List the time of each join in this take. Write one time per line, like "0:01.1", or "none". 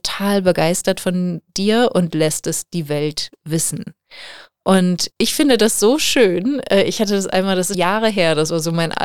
0:05.1
0:07.7

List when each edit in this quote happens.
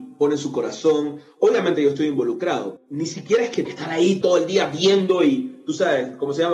0:02.8
0:03.6
0:04.2

